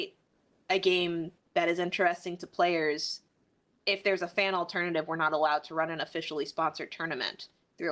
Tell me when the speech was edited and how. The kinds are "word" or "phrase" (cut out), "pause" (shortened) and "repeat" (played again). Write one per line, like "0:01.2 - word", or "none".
none